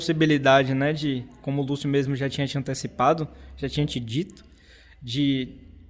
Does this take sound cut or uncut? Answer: uncut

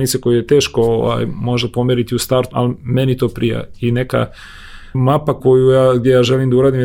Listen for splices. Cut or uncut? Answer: cut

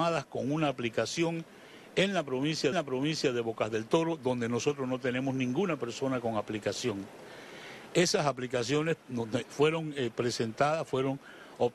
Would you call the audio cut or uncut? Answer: cut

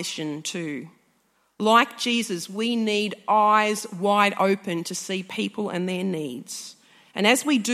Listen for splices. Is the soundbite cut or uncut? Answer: uncut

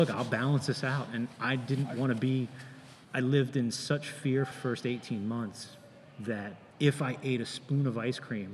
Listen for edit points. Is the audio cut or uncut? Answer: cut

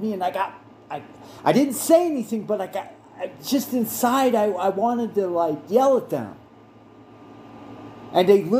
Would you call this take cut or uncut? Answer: uncut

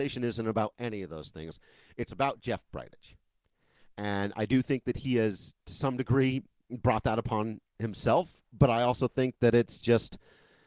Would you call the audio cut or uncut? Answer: uncut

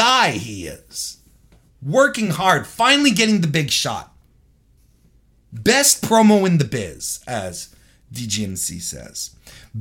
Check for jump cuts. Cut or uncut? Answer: uncut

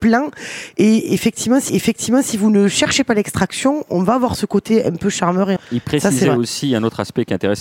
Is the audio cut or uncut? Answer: cut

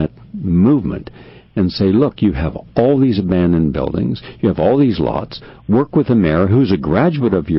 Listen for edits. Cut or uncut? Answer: uncut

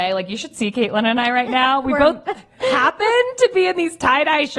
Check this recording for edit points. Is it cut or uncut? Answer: uncut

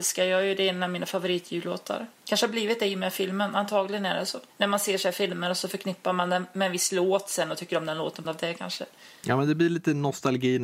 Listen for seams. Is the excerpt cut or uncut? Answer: cut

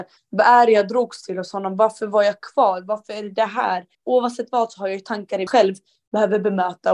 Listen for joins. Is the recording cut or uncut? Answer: cut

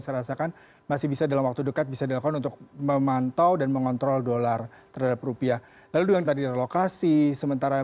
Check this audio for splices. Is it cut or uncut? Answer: cut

